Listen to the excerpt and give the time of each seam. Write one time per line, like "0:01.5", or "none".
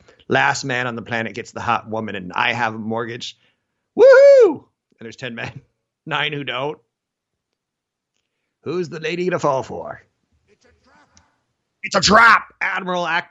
none

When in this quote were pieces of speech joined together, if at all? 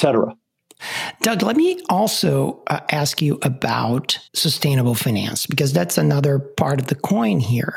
0:04.3

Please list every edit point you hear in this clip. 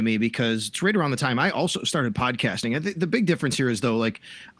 none

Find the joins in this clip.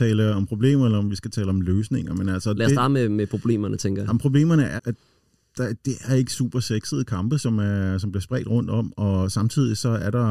0:04.8

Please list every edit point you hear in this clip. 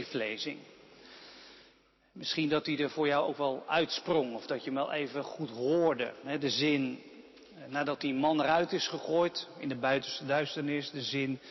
none

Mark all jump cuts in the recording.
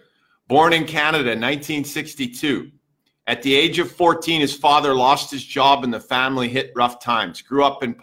none

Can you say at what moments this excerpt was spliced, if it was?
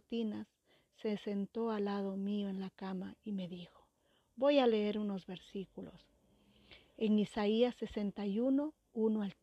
none

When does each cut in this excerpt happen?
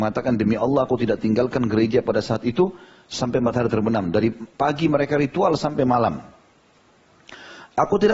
none

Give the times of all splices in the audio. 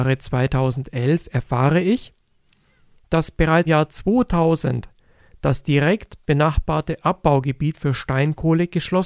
0:03.7

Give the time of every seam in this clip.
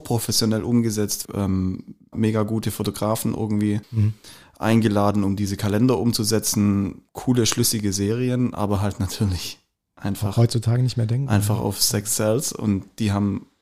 0:01.2
0:02.1
0:03.8
0:07.1

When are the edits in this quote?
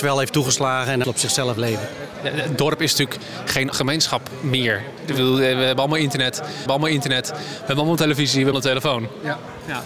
0:01.0
0:03.7
0:06.7
0:08.5

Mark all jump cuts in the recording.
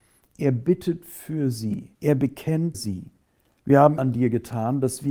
0:01.9
0:02.7
0:03.2
0:04.0

